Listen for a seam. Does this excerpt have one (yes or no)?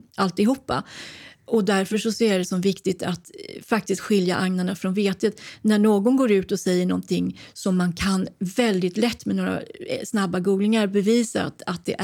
no